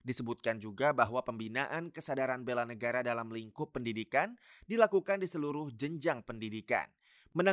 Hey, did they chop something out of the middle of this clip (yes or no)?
no